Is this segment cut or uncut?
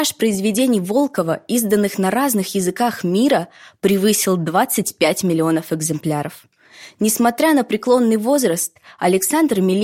uncut